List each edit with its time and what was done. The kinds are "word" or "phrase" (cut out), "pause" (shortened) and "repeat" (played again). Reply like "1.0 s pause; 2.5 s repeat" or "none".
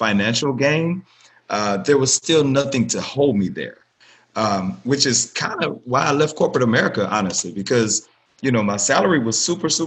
none